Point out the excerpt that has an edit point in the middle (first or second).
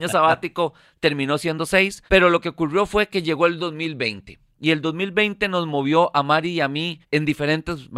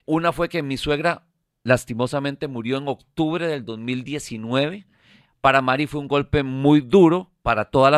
first